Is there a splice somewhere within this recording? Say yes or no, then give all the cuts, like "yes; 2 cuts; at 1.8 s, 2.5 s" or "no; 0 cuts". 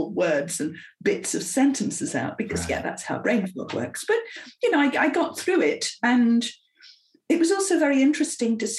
no; 0 cuts